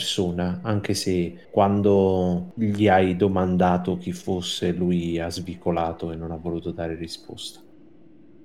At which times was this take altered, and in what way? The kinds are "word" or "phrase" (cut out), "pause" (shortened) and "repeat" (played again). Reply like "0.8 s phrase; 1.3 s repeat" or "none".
1.4 s pause